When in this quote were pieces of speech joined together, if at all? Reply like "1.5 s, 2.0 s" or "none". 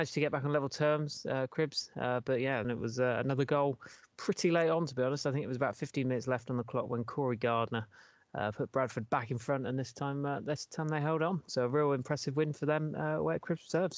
2.6 s